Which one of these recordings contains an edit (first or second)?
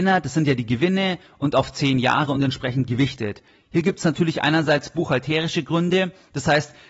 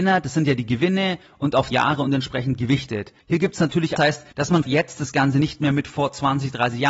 second